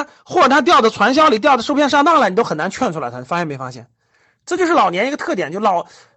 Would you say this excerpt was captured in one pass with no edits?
yes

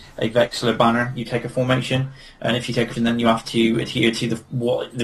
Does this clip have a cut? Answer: yes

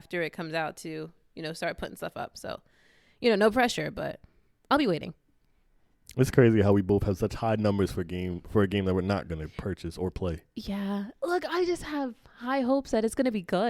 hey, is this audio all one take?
yes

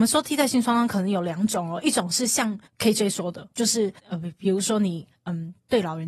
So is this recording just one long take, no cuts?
no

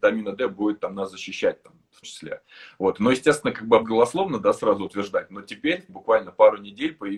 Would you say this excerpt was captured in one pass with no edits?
no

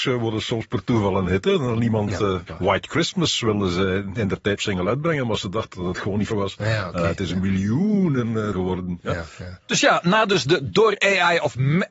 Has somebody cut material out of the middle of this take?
yes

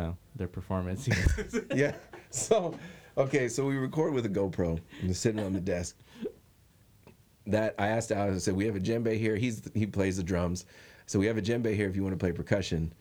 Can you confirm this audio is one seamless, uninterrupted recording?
yes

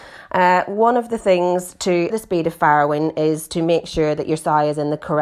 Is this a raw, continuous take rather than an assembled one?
no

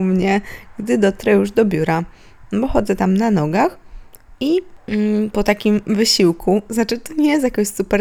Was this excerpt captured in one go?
yes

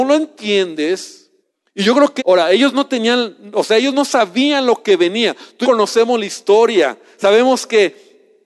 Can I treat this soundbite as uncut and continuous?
no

